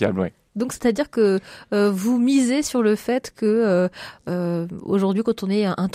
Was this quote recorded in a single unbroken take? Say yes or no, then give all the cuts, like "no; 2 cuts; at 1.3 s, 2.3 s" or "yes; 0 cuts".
yes; 0 cuts